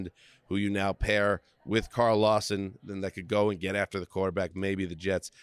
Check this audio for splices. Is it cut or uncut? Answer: uncut